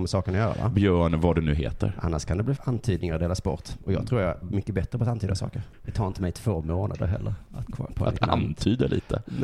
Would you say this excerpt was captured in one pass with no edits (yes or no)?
no